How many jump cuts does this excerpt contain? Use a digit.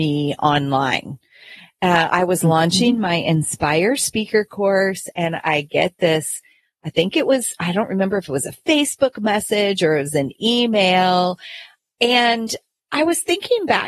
0